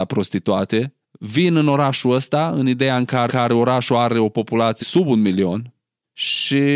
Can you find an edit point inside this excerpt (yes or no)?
yes